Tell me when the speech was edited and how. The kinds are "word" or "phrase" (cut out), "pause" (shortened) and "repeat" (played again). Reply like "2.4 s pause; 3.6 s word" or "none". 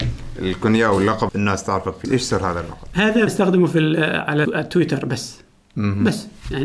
1.3 s phrase; 2.0 s word; 3.3 s phrase; 4.4 s word